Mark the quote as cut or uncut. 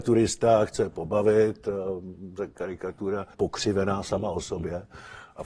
cut